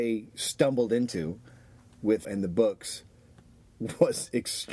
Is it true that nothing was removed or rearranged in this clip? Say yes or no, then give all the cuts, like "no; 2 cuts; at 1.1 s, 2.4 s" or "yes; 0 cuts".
no; 1 cut; at 2.2 s